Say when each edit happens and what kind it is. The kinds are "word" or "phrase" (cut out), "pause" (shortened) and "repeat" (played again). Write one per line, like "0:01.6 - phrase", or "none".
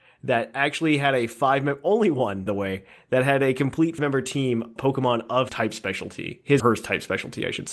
0:02.5 - word
0:04.0 - word
0:04.8 - word
0:05.5 - word
0:06.6 - word